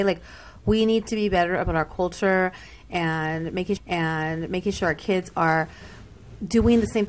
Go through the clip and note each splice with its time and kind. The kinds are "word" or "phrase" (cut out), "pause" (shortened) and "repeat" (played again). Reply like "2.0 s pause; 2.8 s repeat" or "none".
3.8 s repeat